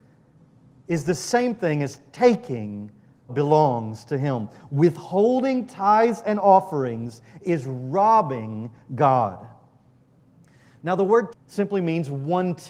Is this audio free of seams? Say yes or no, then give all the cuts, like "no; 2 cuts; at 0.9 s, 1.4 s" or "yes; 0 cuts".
no; 2 cuts; at 3.3 s, 11.3 s